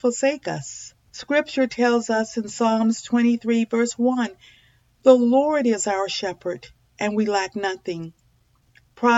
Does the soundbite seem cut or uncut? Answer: cut